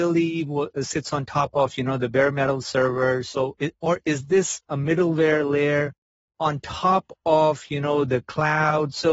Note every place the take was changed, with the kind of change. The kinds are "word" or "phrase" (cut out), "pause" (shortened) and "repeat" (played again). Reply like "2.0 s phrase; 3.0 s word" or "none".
none